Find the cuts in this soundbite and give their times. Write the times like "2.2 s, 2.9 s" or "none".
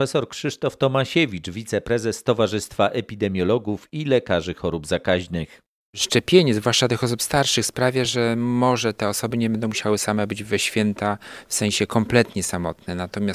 none